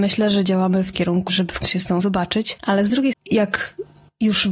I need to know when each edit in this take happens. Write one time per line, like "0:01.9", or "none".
0:00.9
0:01.3
0:01.6
0:02.0
0:03.1